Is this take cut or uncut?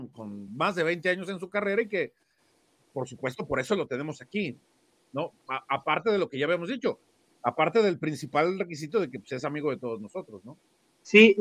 uncut